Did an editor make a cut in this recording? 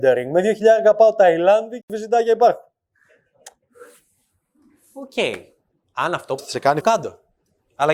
yes; 3 cuts; at 1.8 s, 6.4 s, 6.8 s

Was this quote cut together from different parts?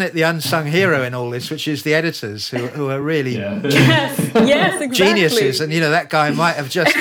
no; 0 cuts

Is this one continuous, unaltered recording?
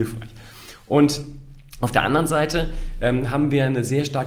yes; 0 cuts

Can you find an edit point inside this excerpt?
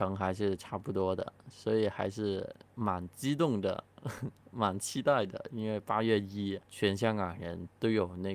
yes; 2 cuts; at 4.4 s, 6.6 s

